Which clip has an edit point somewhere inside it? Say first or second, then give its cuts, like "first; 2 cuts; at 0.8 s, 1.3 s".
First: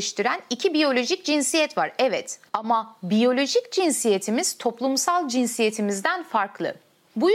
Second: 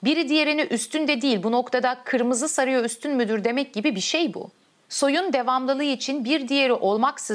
first; 1 cut; at 2.5 s